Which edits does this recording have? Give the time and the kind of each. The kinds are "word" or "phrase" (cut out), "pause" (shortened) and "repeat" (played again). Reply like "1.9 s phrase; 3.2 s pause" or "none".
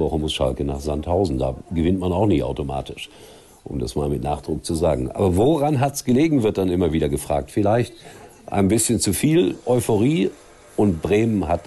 none